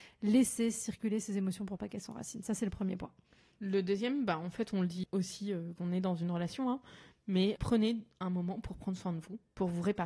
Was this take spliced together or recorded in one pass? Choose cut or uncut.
cut